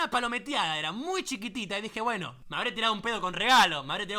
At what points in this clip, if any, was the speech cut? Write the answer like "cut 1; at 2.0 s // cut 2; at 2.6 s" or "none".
none